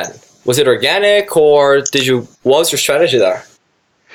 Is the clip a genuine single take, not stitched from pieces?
no; 1 cut; at 2.4 s

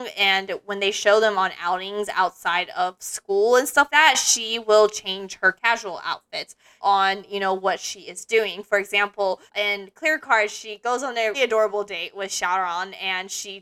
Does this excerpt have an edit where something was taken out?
yes; 4 cuts; at 3.9 s, 6.8 s, 9.5 s, 11.3 s

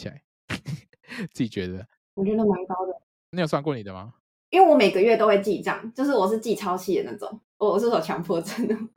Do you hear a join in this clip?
yes; 1 cut; at 7.5 s

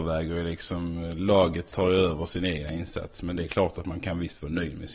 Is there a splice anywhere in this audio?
yes; 1 cut; at 1.7 s

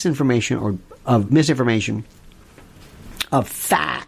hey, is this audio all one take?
no; 1 cut; at 1.3 s

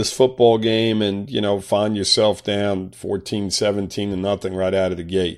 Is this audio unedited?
yes; 0 cuts

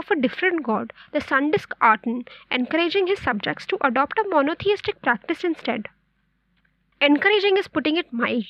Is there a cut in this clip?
no; 0 cuts

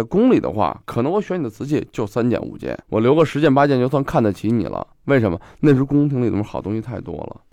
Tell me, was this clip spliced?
yes; 1 cut; at 2.8 s

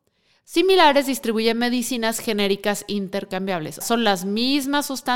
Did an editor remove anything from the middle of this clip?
yes; 1 cut; at 3.8 s

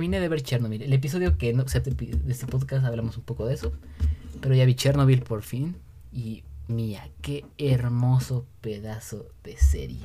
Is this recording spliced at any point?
yes; 3 cuts; at 1.8 s, 6.7 s, 7.5 s

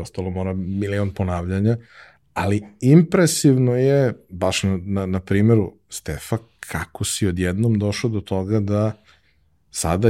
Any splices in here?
no; 0 cuts

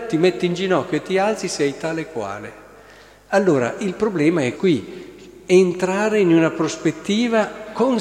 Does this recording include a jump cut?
yes; 1 cut; at 4.6 s

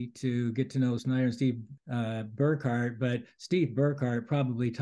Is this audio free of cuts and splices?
no; 2 cuts; at 1.0 s, 1.8 s

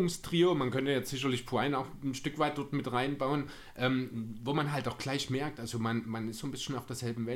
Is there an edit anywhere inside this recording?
no; 0 cuts

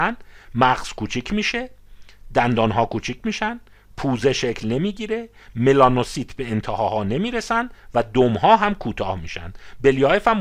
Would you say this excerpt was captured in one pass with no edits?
yes; 0 cuts

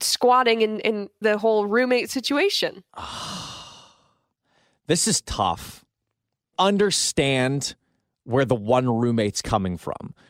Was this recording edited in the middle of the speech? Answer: yes; 3 cuts; at 1.2 s, 2.9 s, 6.5 s

